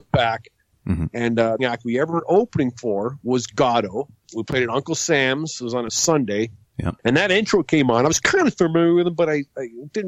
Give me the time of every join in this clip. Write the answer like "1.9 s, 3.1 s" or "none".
1.6 s, 7.0 s